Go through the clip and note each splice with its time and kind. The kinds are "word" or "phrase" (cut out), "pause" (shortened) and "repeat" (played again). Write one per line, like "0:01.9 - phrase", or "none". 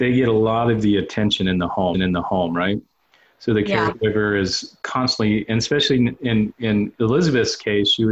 0:01.9 - repeat